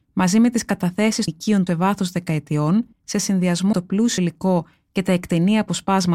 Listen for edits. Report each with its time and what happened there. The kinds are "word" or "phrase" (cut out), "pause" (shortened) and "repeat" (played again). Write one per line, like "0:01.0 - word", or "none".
0:01.3 - word
0:01.7 - word
0:02.9 - pause
0:03.7 - word
0:04.2 - word